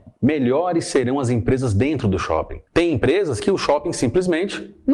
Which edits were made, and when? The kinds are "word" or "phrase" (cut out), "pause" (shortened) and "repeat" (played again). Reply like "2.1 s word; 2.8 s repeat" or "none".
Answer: 2.7 s pause